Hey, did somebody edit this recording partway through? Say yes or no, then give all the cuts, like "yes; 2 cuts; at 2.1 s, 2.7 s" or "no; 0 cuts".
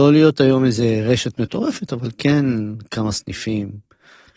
no; 0 cuts